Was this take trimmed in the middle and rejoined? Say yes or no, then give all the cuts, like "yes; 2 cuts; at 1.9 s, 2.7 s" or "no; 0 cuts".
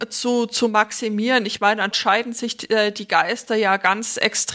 yes; 1 cut; at 1.9 s